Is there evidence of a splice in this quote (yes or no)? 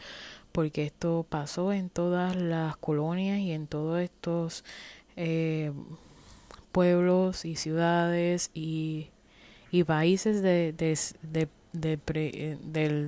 no